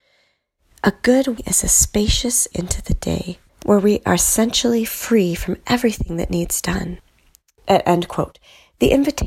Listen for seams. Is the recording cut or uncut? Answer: cut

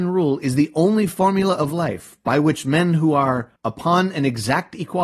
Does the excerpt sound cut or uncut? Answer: cut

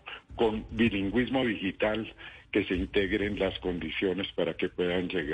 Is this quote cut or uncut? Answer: uncut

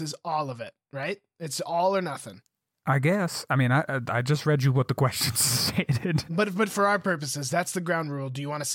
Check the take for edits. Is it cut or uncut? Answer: uncut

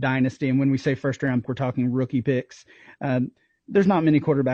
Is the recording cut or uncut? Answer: cut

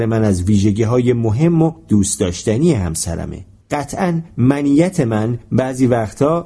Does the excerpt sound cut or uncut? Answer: cut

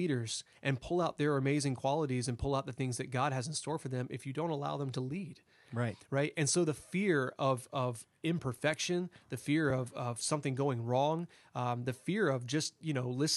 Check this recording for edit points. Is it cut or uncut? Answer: uncut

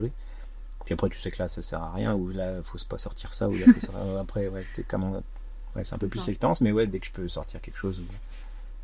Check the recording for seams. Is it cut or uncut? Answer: uncut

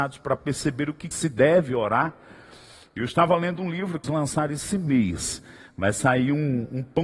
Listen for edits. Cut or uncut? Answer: cut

